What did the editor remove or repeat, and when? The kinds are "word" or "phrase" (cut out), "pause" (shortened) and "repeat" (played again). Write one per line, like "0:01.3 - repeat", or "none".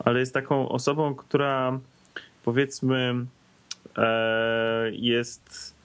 none